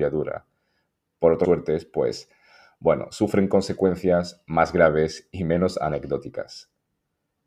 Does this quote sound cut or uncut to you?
cut